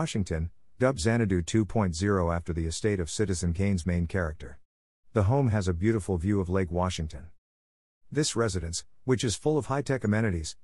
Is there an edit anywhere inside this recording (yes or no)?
no